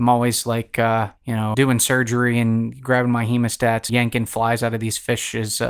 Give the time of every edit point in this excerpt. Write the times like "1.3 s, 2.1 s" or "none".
1.2 s, 1.5 s, 3.9 s